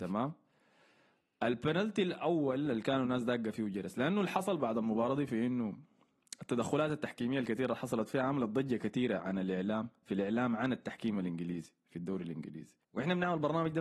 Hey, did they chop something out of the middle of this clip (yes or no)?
yes